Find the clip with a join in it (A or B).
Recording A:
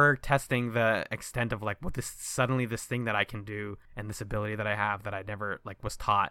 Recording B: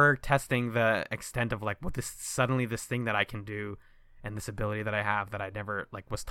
A